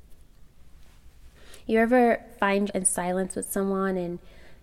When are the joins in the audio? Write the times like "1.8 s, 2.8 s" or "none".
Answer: 2.7 s